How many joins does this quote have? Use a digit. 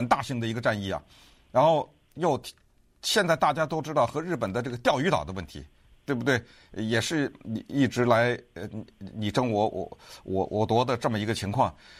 0